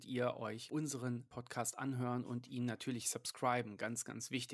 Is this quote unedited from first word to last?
yes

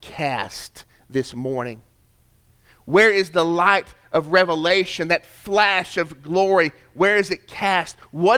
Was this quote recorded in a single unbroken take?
yes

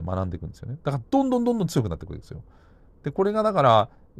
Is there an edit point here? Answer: no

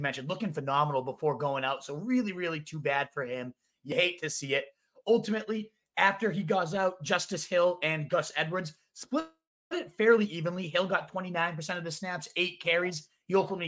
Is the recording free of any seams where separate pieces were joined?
yes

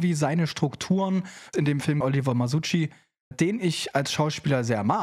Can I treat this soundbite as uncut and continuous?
no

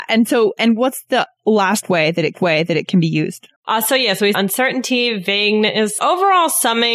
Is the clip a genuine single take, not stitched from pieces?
no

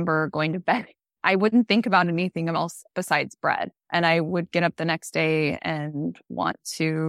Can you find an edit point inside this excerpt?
yes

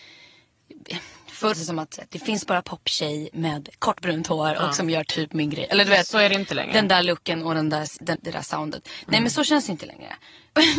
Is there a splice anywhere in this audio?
yes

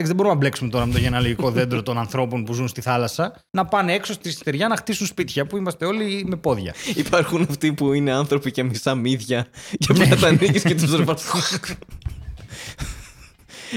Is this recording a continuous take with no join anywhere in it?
no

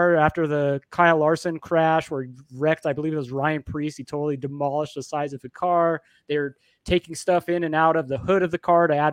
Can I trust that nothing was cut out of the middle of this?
yes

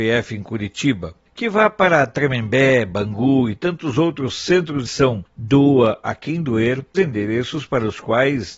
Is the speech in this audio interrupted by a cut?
yes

